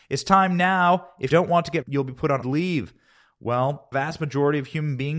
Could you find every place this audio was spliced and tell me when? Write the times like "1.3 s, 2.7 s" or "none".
1.3 s, 1.8 s, 2.4 s, 3.9 s